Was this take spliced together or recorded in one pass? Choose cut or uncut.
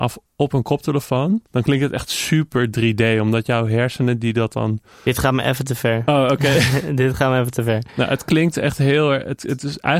cut